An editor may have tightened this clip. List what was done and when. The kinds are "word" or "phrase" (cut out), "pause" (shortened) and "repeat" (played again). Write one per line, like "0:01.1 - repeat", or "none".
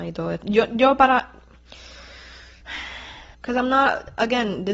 0:03.3 - pause

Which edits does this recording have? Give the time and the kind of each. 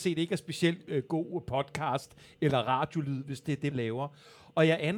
0:03.7 - word

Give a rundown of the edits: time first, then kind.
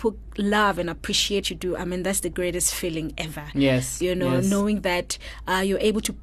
0:01.4 - word

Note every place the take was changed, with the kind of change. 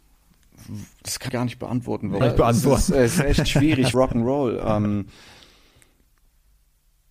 0:00.9 - pause
0:01.3 - word
0:02.2 - phrase
0:03.9 - word

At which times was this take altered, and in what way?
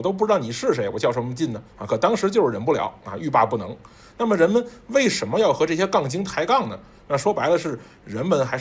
0:01.7 - pause

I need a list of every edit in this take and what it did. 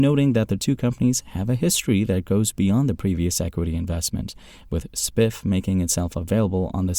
none

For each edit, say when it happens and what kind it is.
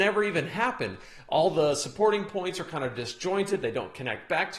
none

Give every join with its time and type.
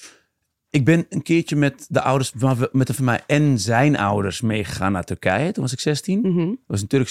0:03.0 - word

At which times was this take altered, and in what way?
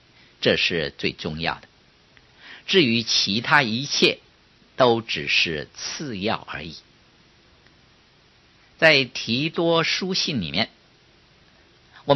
none

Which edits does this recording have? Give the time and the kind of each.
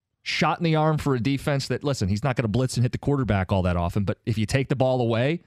none

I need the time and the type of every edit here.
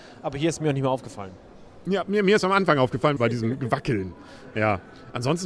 0:03.2 - phrase

